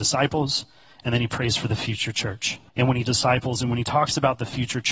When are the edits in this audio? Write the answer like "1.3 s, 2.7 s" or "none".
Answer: 2.7 s, 3.0 s